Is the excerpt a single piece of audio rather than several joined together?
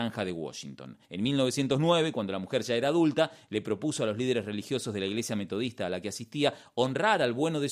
no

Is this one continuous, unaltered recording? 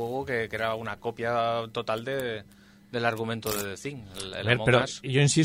yes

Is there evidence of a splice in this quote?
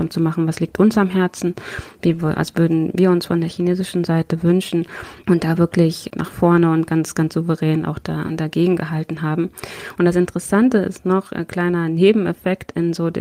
no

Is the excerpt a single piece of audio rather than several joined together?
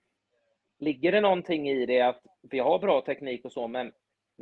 yes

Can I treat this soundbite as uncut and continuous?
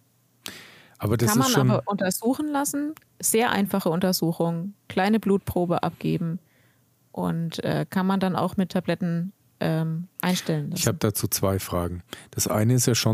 yes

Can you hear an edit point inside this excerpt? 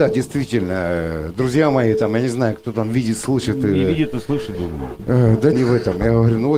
yes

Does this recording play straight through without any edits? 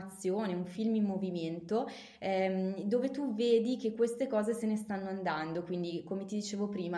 yes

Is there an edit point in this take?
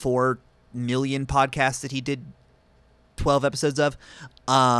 no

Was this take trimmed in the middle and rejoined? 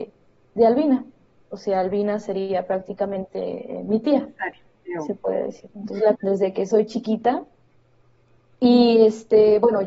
yes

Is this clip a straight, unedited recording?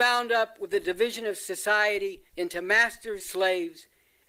no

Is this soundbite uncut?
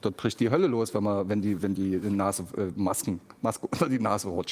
yes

